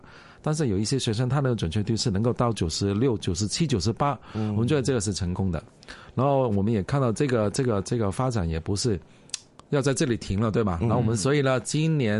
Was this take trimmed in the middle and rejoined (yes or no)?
no